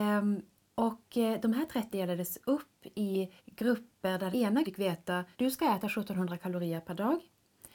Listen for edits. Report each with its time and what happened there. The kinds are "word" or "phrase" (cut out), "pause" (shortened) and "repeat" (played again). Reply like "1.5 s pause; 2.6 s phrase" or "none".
1.9 s word; 3.4 s pause; 4.3 s word; 4.6 s word; 5.3 s pause